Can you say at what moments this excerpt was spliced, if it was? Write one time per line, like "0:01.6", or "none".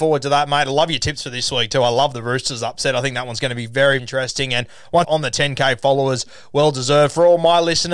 0:04.0
0:05.0

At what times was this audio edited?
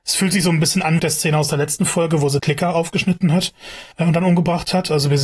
0:01.0
0:02.4
0:03.9

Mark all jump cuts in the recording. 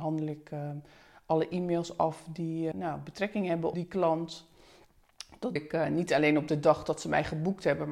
0:02.7
0:03.7
0:05.6

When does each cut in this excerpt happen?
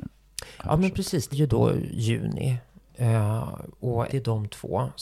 0:01.3
0:04.1

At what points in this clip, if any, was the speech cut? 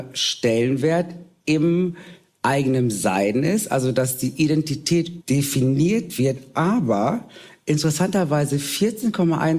0:05.2

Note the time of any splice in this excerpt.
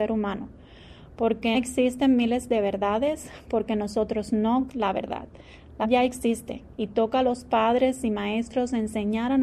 0:01.5
0:04.7
0:05.8

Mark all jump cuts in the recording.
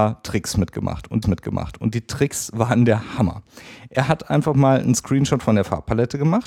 0:01.2

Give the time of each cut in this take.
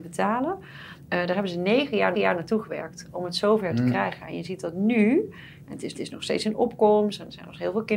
0:02.1
0:05.9

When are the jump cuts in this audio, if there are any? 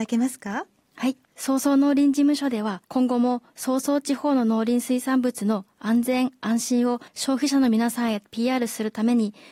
0:02.8
0:07.1

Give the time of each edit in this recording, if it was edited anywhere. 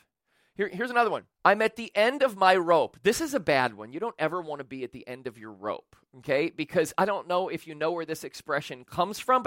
0:01.3

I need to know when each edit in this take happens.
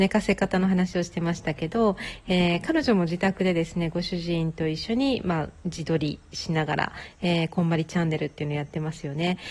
0:05.6

